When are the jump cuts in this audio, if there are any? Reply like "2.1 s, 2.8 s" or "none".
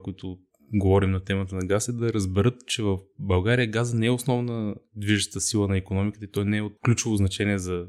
6.8 s